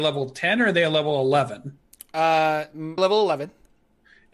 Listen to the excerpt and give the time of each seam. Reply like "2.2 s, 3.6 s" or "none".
3.0 s